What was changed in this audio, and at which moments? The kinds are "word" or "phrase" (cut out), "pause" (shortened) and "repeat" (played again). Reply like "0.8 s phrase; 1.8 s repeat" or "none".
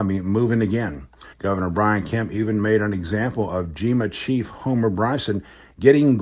1.3 s pause